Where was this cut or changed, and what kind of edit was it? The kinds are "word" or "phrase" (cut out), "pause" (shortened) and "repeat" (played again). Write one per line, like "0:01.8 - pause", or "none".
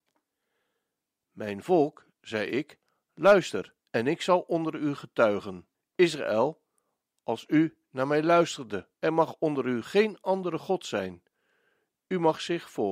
0:03.8 - pause
0:05.7 - pause
0:08.9 - pause